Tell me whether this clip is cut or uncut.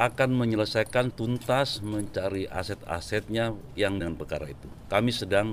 cut